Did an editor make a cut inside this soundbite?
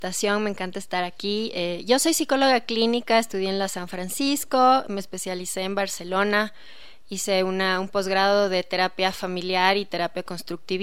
no; 0 cuts

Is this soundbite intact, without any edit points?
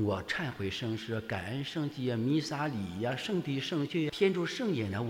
no; 1 cut; at 4.1 s

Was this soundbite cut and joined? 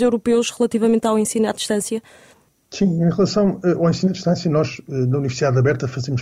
no; 0 cuts

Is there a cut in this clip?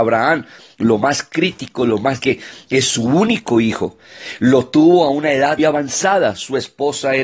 yes; 2 cuts; at 2.2 s, 5.6 s

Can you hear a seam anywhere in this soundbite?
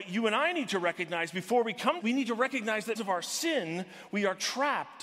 yes; 2 cuts; at 2.0 s, 2.9 s

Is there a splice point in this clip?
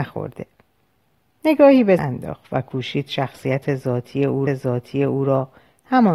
yes; 2 cuts; at 2.0 s, 4.5 s

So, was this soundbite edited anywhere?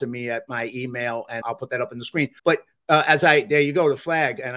yes; 2 cuts; at 1.4 s, 2.4 s

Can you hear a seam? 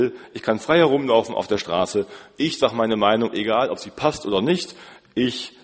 yes; 1 cut; at 3.3 s

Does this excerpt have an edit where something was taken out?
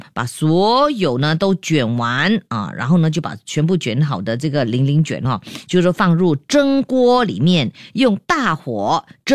no; 0 cuts

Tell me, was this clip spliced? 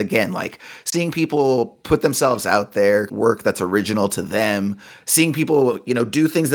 yes; 1 cut; at 3.1 s

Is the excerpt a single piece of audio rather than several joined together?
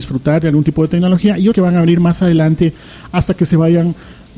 no; 1 cut; at 1.5 s

